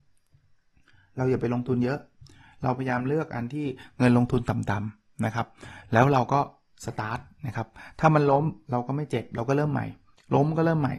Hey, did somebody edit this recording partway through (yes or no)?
no